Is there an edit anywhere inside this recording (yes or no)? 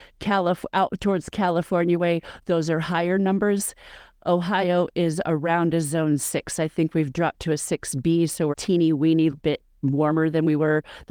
yes